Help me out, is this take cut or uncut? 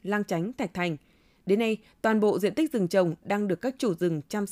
uncut